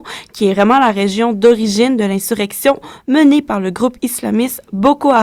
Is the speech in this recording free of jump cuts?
yes; 0 cuts

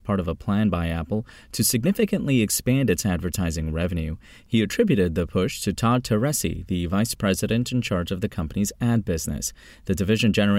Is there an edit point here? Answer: no; 0 cuts

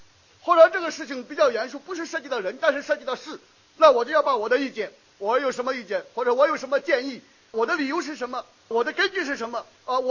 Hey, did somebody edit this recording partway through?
yes; 2 cuts; at 7.5 s, 8.7 s

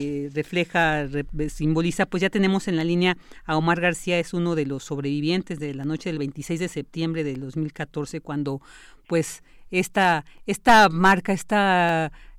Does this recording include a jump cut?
no; 0 cuts

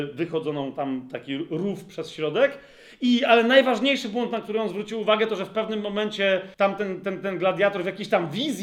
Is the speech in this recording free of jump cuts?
no; 1 cut; at 6.5 s

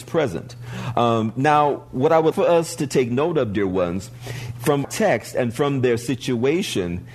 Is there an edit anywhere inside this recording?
yes; 2 cuts; at 2.3 s, 4.8 s

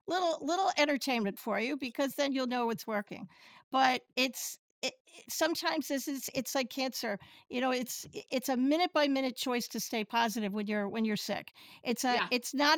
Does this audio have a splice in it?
no; 0 cuts

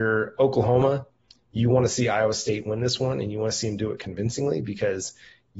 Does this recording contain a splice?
no; 0 cuts

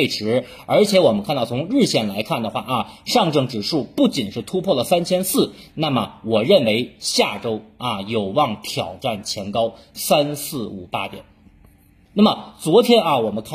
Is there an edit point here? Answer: no; 0 cuts

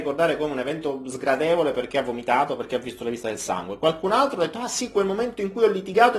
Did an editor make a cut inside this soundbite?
no; 0 cuts

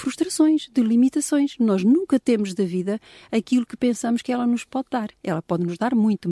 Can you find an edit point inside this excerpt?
no; 0 cuts

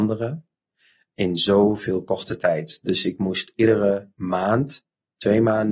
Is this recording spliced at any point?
no; 0 cuts

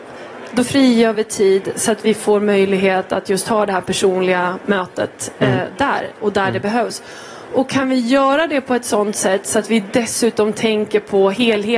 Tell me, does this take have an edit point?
no; 0 cuts

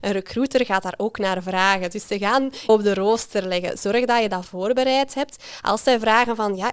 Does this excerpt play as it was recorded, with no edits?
no; 1 cut; at 2.7 s

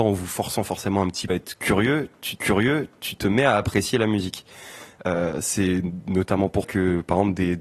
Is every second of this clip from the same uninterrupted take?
no; 3 cuts; at 1.3 s, 2.4 s, 6.6 s

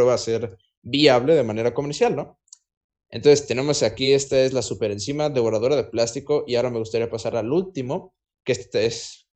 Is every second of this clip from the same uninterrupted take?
yes; 0 cuts

